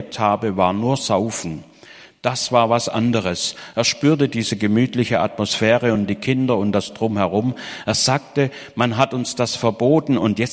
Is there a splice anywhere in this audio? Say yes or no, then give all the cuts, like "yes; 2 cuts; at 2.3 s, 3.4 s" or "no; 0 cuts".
no; 0 cuts